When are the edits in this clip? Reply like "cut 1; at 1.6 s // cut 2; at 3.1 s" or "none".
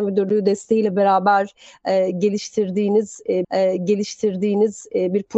cut 1; at 3.4 s